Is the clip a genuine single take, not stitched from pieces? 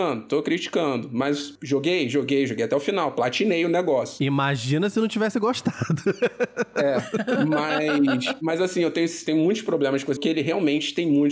no; 1 cut; at 10.2 s

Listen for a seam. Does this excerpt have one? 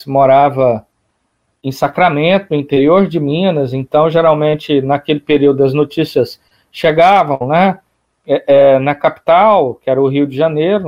no; 0 cuts

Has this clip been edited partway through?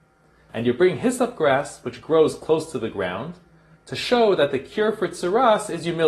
no; 0 cuts

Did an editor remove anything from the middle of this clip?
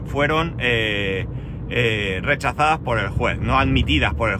no; 0 cuts

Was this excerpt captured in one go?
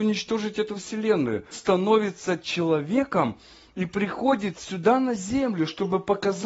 no; 1 cut; at 1.5 s

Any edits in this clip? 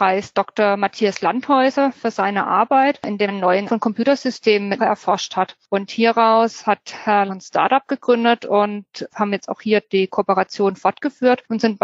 yes; 5 cuts; at 3.3 s, 3.7 s, 4.8 s, 7.3 s, 9.1 s

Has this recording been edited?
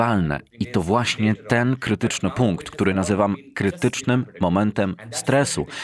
no; 0 cuts

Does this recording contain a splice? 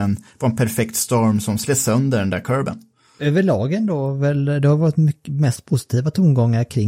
no; 0 cuts

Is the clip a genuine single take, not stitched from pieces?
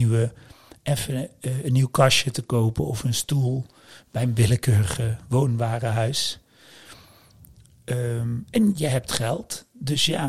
yes; 0 cuts

